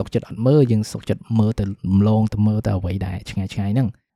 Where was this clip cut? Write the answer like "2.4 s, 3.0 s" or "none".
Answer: none